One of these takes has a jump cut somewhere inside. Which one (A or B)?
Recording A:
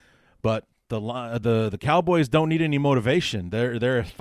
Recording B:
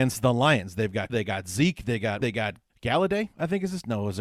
B